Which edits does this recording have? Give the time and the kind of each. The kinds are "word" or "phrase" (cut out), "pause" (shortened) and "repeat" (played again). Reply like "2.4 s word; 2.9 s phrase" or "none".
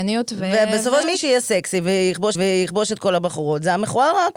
1.0 s word; 2.3 s repeat